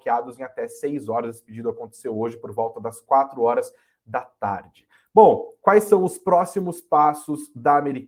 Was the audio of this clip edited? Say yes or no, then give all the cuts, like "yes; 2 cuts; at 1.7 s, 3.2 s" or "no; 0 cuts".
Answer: no; 0 cuts